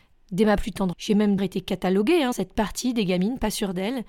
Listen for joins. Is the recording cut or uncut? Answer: cut